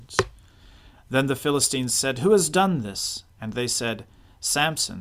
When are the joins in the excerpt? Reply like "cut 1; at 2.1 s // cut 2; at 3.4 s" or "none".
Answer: cut 1; at 3.3 s